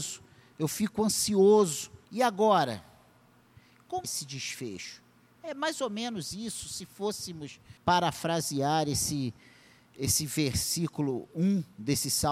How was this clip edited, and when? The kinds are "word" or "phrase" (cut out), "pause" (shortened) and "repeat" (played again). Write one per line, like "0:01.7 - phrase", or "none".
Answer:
0:02.0 - pause
0:04.0 - word
0:07.8 - pause